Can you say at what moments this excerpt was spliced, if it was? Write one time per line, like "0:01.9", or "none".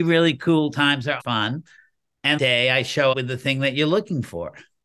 0:01.2
0:02.4
0:03.1